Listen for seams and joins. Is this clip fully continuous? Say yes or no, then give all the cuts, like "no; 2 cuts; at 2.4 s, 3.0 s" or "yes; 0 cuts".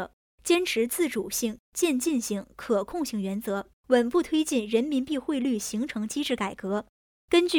no; 1 cut; at 3.8 s